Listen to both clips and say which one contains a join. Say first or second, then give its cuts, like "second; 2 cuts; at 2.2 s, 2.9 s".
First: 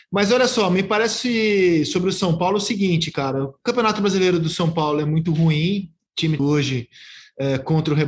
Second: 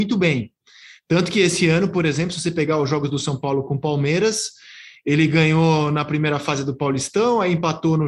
first; 1 cut; at 6.4 s